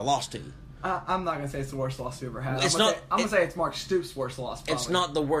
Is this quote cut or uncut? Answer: uncut